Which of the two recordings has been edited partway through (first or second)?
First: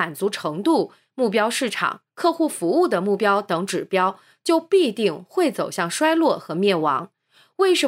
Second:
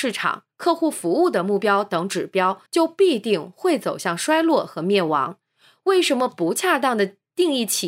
second